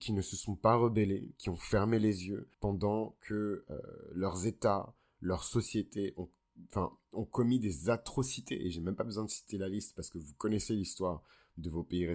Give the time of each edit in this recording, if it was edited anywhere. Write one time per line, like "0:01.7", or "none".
0:02.5